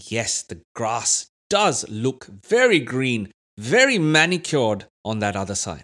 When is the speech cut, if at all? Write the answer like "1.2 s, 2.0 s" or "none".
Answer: 4.9 s